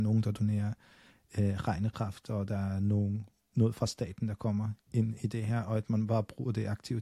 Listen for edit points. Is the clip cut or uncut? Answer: uncut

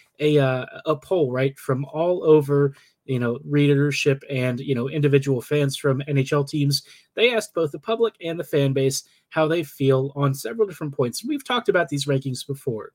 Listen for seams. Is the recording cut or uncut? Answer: uncut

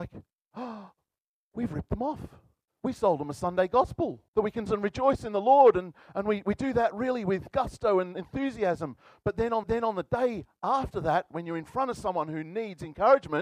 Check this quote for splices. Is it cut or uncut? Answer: cut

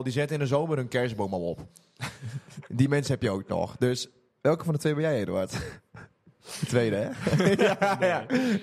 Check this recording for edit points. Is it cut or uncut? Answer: uncut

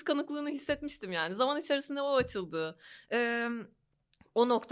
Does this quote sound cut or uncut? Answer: uncut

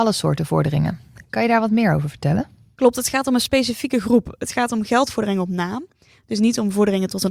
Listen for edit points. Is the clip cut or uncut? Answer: uncut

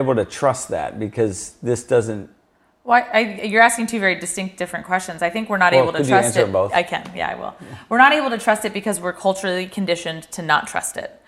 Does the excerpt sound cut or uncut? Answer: uncut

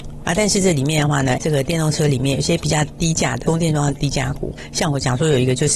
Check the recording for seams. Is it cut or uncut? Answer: cut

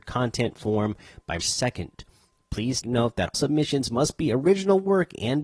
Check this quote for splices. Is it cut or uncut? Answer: cut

